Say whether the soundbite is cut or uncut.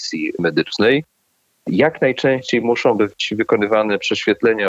uncut